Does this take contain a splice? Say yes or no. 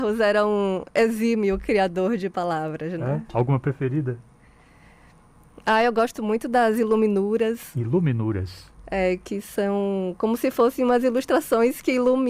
no